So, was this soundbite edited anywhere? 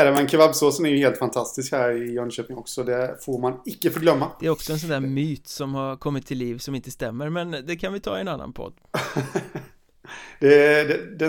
no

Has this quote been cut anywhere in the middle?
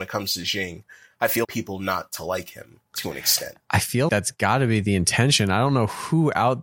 yes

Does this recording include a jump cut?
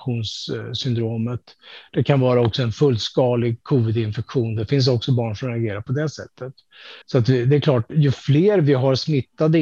yes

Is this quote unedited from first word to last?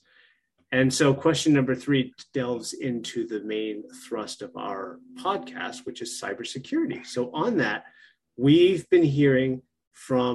yes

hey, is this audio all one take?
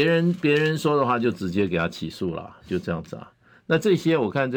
yes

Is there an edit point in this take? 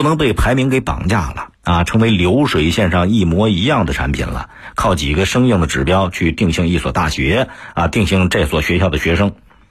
yes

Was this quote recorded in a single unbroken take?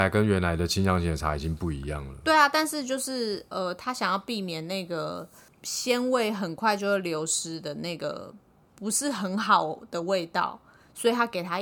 yes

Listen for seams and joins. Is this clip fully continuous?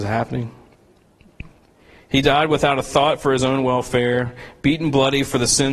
yes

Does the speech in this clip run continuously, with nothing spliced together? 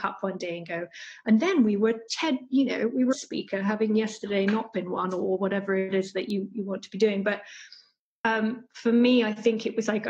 no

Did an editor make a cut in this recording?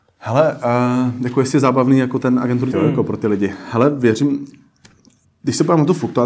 yes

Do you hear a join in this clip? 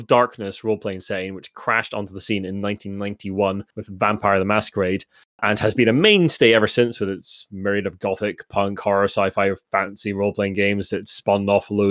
yes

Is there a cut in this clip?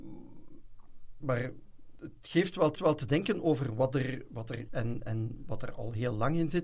yes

